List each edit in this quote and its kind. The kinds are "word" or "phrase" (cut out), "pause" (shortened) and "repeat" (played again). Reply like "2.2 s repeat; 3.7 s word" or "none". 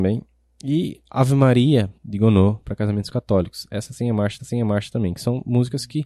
2.0 s pause; 4.4 s repeat